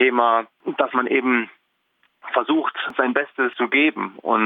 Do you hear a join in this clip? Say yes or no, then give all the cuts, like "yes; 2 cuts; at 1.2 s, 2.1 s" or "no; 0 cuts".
no; 0 cuts